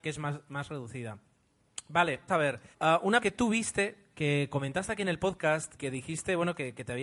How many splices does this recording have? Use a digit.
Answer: 4